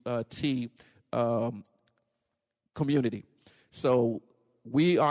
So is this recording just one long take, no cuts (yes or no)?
yes